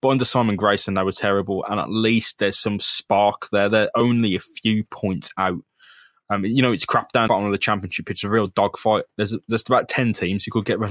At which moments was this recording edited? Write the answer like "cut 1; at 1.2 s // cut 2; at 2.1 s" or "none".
cut 1; at 7.3 s